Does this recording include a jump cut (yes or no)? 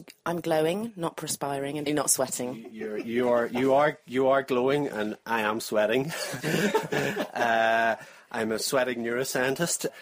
yes